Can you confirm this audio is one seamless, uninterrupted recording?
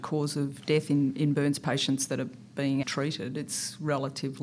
no; 1 cut; at 2.8 s

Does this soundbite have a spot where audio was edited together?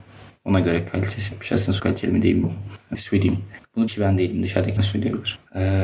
yes; 6 cuts; at 1.3 s, 1.8 s, 2.4 s, 2.9 s, 3.9 s, 4.8 s

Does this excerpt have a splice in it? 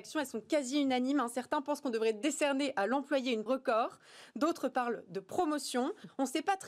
yes; 1 cut; at 3.5 s

